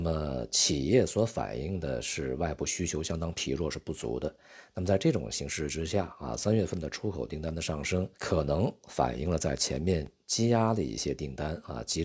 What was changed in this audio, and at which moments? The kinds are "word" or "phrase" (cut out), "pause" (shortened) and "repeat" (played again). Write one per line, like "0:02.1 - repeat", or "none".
0:08.1 - pause